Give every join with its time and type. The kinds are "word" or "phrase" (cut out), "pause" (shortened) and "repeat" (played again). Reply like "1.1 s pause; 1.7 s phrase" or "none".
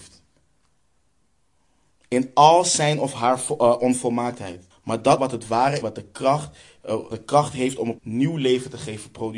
4.7 s pause; 5.2 s phrase; 5.8 s word; 7.1 s word; 8.0 s word